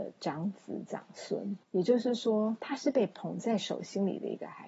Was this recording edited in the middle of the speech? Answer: yes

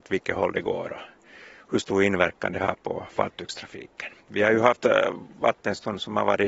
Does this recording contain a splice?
yes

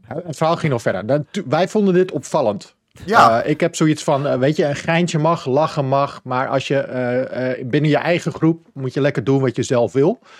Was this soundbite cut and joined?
no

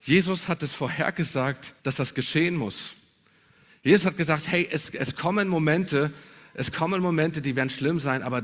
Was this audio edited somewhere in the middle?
yes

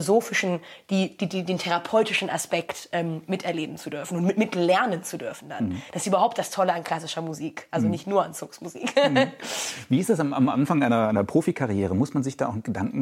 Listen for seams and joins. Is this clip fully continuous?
yes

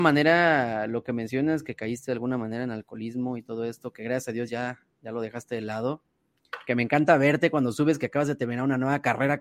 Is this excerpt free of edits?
yes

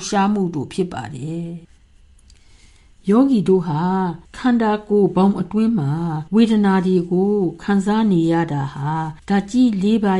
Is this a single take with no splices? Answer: no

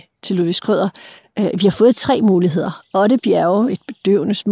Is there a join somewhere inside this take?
no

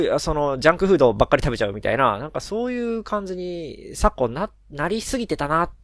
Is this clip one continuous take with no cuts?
no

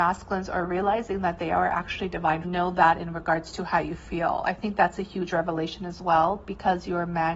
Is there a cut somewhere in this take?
yes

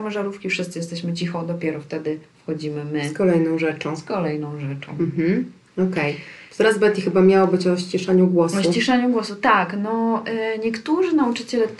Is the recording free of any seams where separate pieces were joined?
yes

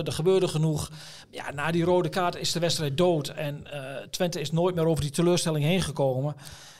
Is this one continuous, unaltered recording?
yes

